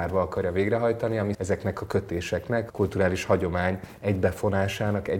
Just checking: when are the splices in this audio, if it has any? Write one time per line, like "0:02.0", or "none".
0:01.3
0:02.7